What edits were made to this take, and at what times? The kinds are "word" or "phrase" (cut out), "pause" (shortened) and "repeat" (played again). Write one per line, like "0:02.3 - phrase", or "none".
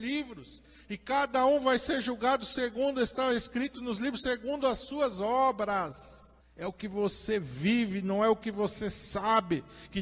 0:06.4 - pause